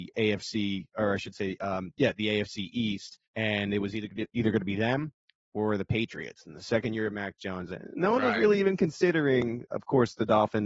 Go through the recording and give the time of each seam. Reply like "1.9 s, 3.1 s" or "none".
3.3 s